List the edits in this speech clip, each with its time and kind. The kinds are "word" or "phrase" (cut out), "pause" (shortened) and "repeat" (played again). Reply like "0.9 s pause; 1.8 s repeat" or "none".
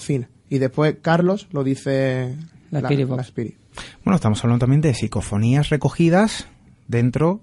none